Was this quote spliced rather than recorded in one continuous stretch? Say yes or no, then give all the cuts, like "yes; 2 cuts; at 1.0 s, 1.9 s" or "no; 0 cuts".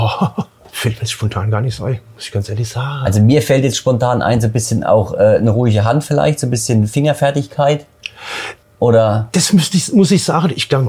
yes; 1 cut; at 8.6 s